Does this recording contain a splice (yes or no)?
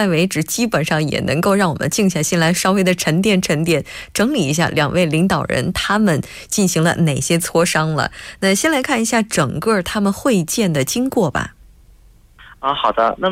no